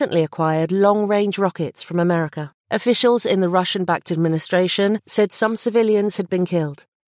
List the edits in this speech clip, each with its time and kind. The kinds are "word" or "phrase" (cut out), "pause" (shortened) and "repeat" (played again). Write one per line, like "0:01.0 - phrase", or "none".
0:02.6 - pause